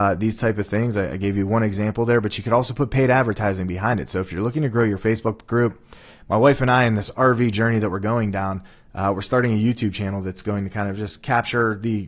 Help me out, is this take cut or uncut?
uncut